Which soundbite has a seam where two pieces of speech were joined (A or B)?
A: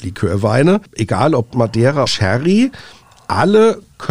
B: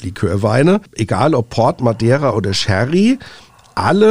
A